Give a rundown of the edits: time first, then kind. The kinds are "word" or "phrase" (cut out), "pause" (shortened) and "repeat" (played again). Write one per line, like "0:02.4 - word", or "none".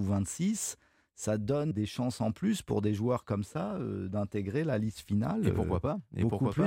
0:01.7 - word

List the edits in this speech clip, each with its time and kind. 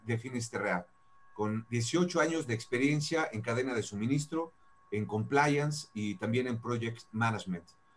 none

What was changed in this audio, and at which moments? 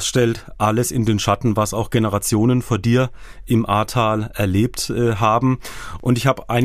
none

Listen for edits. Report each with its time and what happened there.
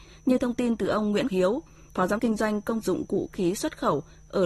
0:01.2 - word
0:02.2 - word
0:02.8 - phrase
0:03.3 - word

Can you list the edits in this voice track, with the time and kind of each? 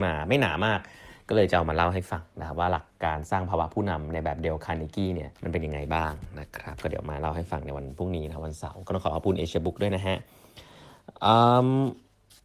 0:05.3 - pause

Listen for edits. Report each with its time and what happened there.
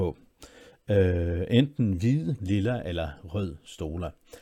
0:02.4 - word

